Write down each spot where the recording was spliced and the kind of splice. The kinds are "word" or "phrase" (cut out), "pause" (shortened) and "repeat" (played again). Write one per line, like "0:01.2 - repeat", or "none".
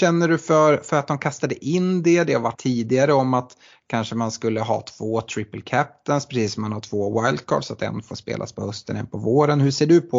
0:02.5 - word